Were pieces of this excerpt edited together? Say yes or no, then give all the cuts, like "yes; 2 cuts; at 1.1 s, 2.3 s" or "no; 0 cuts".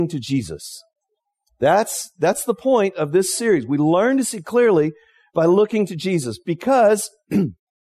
no; 0 cuts